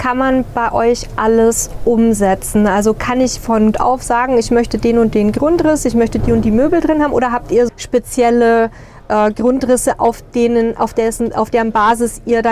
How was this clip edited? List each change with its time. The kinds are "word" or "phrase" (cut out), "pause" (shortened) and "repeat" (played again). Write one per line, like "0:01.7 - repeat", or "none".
0:03.4 - word
0:03.7 - word
0:07.7 - word